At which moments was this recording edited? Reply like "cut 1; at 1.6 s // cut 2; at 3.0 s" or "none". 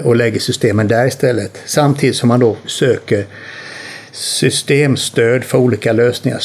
none

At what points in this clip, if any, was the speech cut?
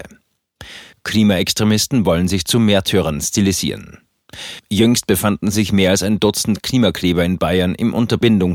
none

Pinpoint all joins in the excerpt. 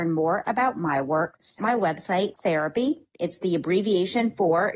cut 1; at 1.6 s // cut 2; at 2.3 s

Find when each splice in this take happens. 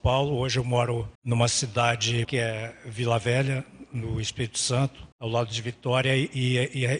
cut 1; at 1.1 s // cut 2; at 2.2 s // cut 3; at 5.1 s

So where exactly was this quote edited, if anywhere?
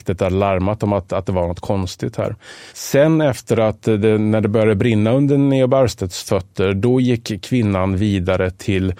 cut 1; at 2.7 s

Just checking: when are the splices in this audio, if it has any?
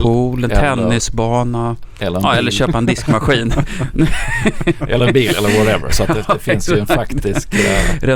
none

